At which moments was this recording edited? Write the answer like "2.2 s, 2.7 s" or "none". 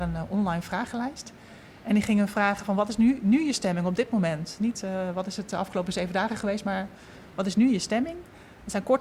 none